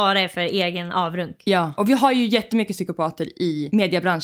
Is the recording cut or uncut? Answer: uncut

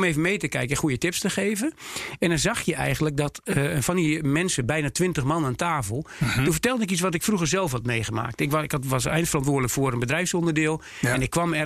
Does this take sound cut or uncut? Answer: uncut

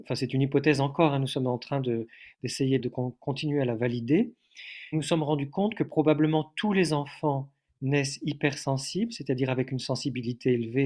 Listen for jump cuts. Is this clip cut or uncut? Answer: cut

